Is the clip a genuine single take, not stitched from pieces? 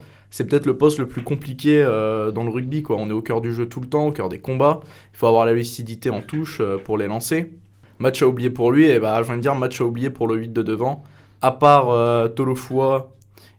yes; 0 cuts

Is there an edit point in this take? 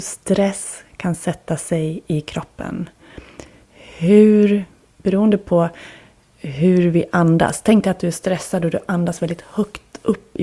no; 0 cuts

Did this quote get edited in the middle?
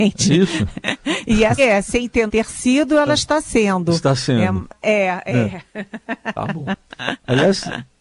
yes; 2 cuts; at 1.6 s, 2.3 s

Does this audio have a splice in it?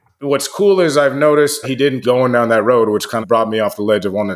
yes; 3 cuts; at 1.6 s, 2.0 s, 3.2 s

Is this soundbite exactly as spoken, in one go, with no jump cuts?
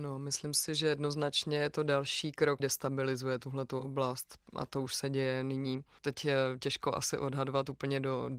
no; 1 cut; at 2.6 s

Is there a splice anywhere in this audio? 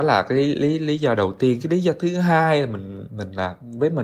no; 0 cuts

